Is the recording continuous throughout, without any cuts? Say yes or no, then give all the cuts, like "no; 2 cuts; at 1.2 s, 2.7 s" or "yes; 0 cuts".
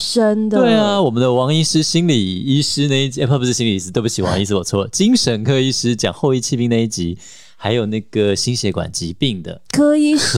yes; 0 cuts